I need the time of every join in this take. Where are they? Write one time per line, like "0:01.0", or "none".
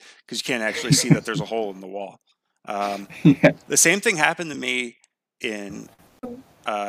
none

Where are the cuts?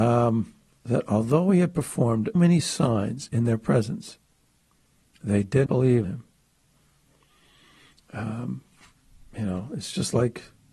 0:02.3
0:05.7
0:06.0

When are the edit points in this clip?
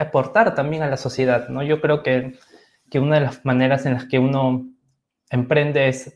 none

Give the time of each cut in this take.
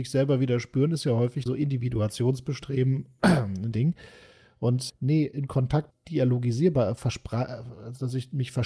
0:01.5
0:03.7
0:04.9
0:05.9

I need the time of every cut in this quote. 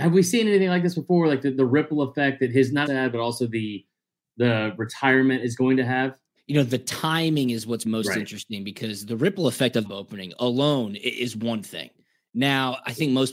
0:02.9
0:06.4
0:07.8
0:09.8

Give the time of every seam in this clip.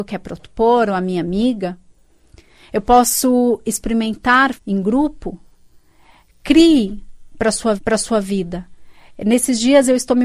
0:04.6
0:07.8

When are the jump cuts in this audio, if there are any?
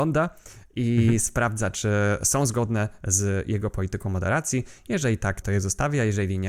0:05.4

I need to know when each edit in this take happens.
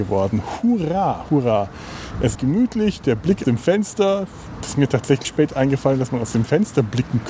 0:01.3
0:02.3
0:03.4
0:04.6
0:05.2

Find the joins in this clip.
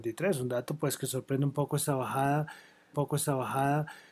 0:02.9

